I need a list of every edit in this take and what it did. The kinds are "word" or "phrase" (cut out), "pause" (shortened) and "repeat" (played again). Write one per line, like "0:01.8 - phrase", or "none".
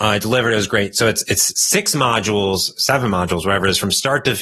none

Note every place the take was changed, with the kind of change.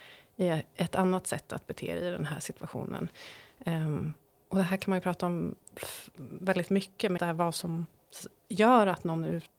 0:07.2 - word

